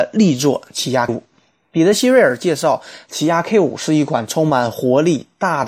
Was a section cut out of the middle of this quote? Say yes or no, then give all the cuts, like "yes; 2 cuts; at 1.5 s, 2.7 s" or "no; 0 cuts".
yes; 1 cut; at 1.1 s